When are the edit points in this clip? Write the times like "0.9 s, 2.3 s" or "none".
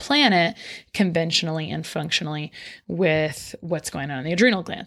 none